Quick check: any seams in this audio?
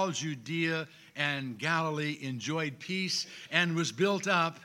no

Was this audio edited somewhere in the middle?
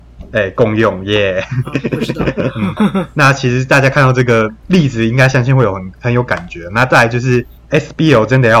yes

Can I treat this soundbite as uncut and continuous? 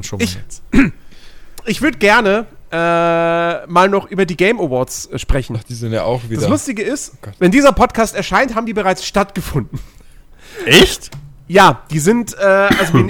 no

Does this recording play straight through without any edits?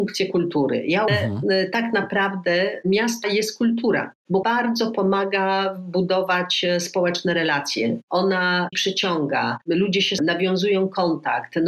no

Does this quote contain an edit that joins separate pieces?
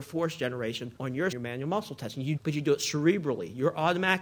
yes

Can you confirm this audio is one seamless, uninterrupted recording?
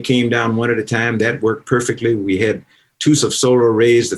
no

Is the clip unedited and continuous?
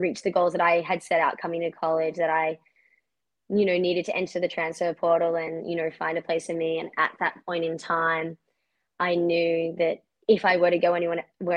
yes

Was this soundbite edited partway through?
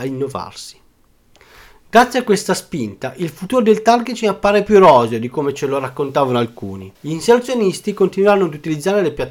yes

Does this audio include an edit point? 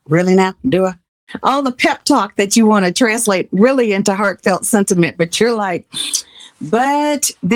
no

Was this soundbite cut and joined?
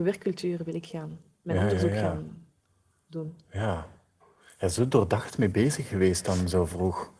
no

